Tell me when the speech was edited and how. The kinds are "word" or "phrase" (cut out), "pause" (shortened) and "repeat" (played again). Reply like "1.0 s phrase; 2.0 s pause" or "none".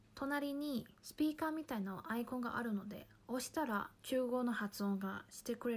1.0 s pause; 3.9 s pause